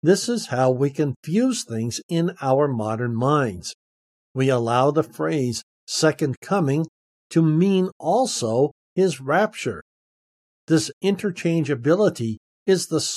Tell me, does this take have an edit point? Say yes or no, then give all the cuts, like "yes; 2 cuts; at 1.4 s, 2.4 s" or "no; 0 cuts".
no; 0 cuts